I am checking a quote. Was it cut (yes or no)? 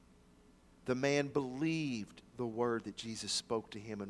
no